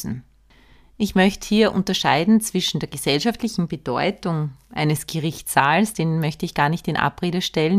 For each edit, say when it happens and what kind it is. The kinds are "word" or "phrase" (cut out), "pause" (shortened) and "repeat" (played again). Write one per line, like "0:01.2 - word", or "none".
none